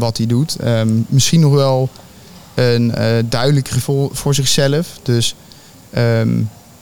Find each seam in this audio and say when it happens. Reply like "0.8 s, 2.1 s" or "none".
3.8 s